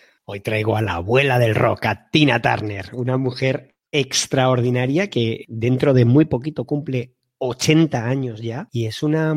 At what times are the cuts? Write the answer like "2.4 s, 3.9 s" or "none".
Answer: none